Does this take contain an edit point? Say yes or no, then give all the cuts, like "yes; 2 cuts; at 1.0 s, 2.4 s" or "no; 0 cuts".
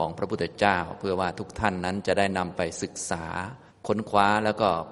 yes; 1 cut; at 3.7 s